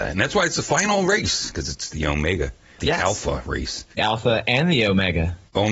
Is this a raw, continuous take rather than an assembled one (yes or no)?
no